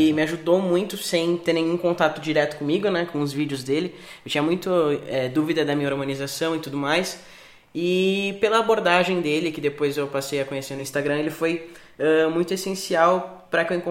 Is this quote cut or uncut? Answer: uncut